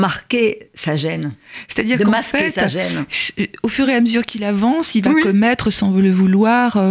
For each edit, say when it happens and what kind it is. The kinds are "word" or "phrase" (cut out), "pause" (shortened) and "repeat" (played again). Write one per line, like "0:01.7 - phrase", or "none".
none